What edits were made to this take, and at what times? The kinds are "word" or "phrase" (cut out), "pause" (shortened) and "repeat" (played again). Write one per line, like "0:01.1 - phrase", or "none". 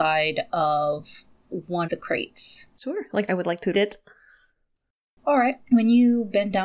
0:01.8 - word
0:02.7 - pause
0:03.3 - word
0:03.7 - word
0:05.6 - pause